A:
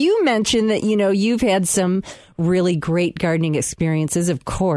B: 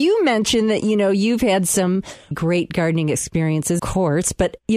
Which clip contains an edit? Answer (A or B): B